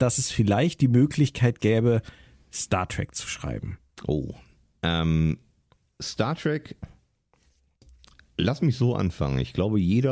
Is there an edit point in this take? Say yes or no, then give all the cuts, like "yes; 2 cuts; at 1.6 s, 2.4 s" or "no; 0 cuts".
no; 0 cuts